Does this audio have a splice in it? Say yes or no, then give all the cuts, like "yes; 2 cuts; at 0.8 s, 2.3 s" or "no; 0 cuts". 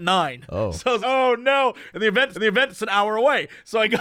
yes; 2 cuts; at 1.0 s, 2.3 s